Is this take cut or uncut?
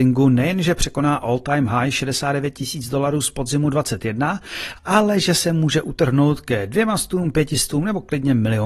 uncut